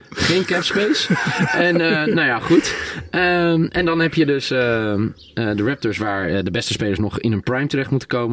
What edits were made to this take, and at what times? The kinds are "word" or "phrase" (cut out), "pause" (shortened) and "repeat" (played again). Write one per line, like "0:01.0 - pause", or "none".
none